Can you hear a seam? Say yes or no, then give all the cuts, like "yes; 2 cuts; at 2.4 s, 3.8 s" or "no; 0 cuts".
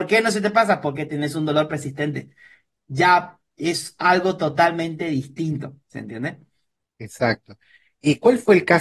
no; 0 cuts